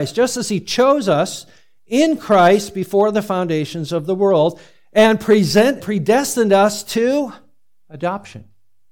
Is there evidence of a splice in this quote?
yes; 1 cut; at 5.8 s

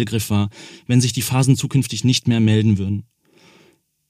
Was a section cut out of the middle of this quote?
no; 0 cuts

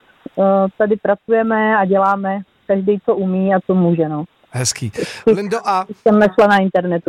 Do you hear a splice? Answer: no; 0 cuts

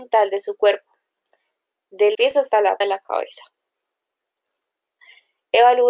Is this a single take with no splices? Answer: no; 2 cuts; at 2.1 s, 2.8 s

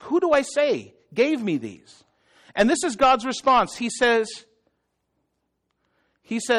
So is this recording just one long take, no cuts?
yes; 0 cuts

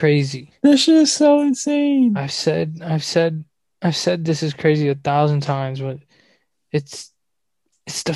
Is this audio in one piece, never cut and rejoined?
yes; 0 cuts

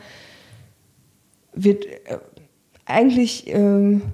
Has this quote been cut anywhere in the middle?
no; 0 cuts

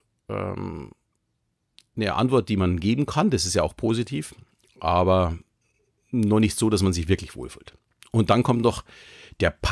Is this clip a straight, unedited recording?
yes; 0 cuts

